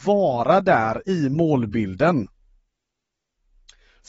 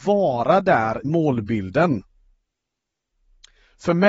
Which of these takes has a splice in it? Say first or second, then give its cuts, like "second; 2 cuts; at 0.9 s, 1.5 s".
second; 1 cut; at 1.0 s